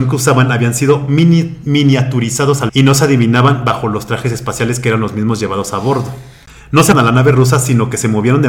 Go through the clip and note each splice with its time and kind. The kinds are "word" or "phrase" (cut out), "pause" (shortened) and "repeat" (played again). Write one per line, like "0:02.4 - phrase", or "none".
0:02.7 - word
0:06.9 - word